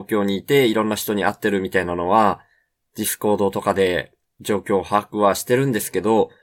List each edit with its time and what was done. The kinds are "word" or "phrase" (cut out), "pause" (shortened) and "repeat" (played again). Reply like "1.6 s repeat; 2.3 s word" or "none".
none